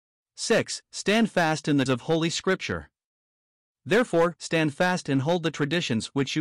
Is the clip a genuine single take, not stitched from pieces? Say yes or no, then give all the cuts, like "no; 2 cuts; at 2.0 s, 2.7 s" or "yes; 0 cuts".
no; 2 cuts; at 1.9 s, 4.4 s